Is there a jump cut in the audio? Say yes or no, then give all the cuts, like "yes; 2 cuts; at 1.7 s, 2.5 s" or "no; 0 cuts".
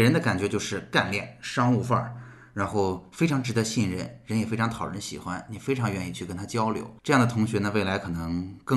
yes; 1 cut; at 7.0 s